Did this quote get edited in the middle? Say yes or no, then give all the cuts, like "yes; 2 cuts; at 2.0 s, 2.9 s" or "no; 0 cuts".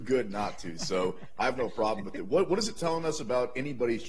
no; 0 cuts